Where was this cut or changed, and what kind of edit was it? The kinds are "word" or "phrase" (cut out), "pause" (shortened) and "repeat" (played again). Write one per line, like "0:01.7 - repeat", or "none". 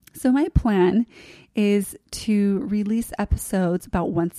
none